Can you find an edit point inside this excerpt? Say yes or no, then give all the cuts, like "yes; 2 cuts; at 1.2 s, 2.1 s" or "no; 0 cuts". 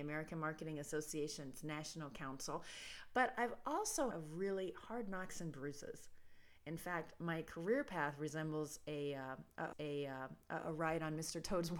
yes; 2 cuts; at 4.1 s, 9.7 s